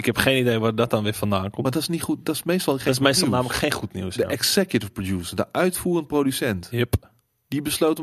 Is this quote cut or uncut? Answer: uncut